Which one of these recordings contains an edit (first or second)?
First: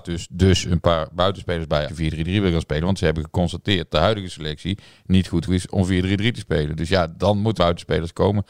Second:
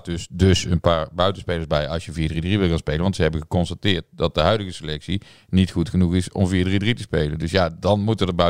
first